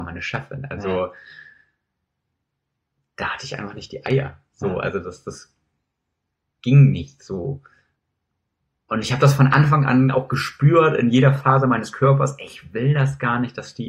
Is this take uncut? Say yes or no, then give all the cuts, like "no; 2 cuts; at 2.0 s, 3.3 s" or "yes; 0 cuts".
yes; 0 cuts